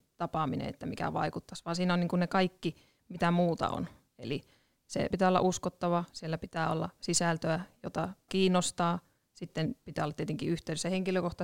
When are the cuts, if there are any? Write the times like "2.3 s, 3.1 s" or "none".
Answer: 5.1 s, 8.3 s